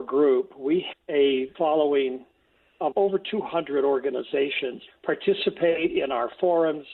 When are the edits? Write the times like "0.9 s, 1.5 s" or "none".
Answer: 0.9 s, 1.5 s, 2.9 s, 4.9 s